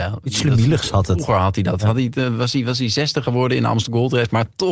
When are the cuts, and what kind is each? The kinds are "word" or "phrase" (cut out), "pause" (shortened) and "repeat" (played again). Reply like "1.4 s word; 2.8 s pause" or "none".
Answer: none